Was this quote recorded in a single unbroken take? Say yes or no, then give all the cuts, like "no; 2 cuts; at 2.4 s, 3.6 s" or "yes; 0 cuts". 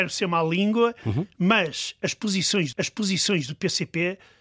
no; 1 cut; at 2.7 s